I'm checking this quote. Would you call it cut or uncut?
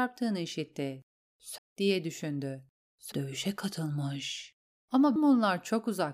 cut